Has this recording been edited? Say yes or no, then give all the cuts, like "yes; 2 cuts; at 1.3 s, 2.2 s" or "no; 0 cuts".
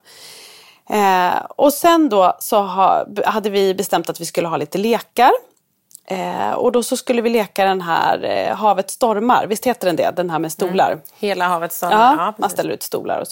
no; 0 cuts